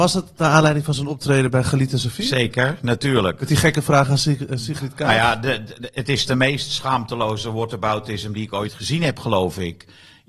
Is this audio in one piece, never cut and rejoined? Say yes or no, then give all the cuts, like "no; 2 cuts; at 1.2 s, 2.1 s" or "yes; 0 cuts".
yes; 0 cuts